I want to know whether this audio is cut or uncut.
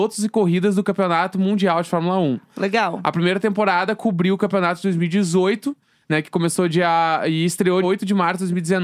cut